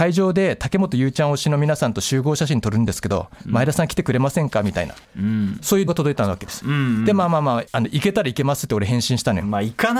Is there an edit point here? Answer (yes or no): yes